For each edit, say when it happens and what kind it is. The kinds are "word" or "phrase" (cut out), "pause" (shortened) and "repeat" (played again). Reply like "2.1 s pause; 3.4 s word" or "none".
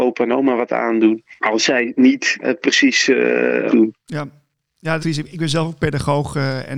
1.4 s pause; 2.4 s word; 3.7 s phrase; 5.0 s phrase